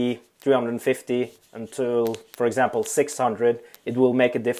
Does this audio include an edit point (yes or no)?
no